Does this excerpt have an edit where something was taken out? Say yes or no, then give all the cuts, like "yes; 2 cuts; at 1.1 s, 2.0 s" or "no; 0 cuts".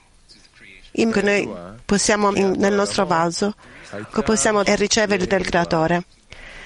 yes; 5 cuts; at 1.1 s, 2.3 s, 4.1 s, 4.6 s, 5.3 s